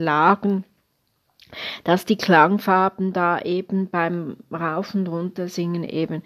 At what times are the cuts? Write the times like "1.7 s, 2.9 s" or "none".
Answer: none

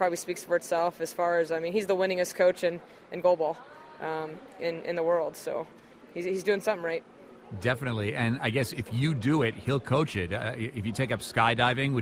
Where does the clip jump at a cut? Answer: none

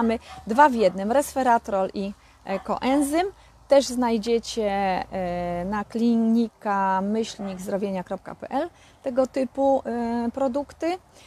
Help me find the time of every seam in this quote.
none

